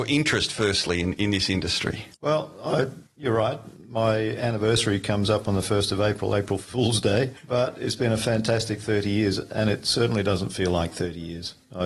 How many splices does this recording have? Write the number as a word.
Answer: one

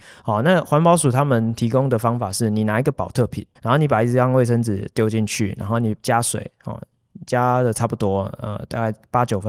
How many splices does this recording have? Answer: one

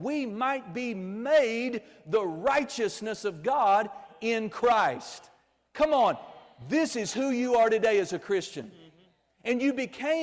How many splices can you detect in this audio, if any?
zero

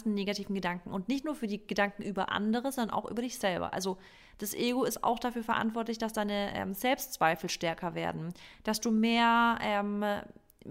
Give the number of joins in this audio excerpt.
zero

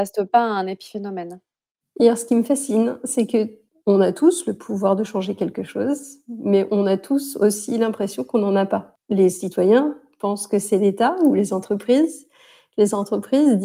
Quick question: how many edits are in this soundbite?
zero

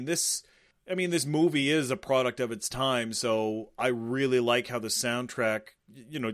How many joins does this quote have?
zero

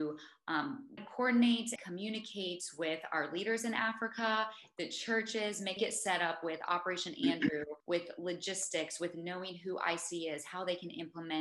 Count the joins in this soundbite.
four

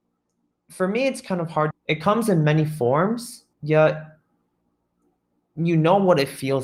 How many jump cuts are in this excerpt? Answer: two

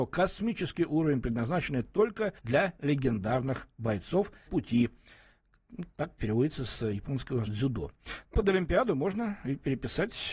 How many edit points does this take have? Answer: five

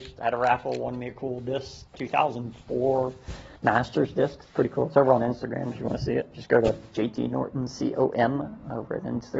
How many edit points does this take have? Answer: one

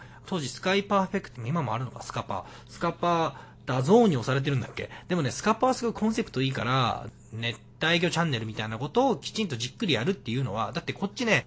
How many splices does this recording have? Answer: one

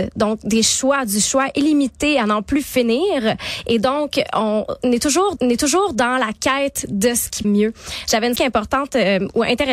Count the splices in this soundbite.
three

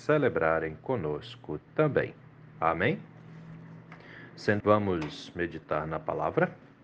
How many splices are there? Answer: one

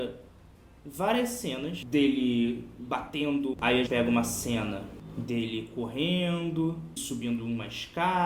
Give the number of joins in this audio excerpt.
three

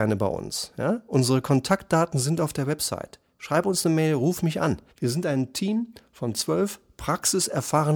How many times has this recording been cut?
one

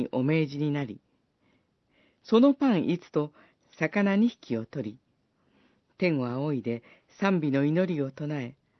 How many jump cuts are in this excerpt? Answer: one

